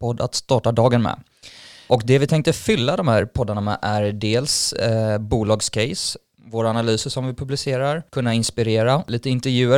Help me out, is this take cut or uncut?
cut